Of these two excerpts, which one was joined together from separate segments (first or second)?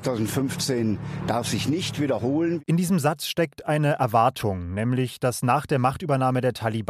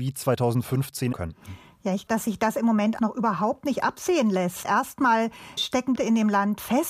second